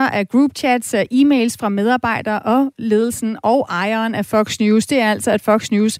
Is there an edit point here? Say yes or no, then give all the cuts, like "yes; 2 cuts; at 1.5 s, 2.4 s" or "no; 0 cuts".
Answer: no; 0 cuts